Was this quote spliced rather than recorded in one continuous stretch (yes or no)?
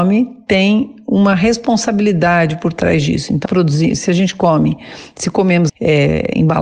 yes